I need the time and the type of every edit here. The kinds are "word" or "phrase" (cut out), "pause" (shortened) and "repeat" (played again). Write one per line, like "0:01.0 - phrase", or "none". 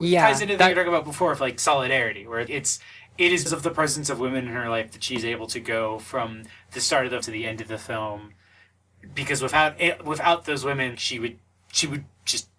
0:02.5 - word
0:03.5 - word
0:07.2 - word
0:10.9 - word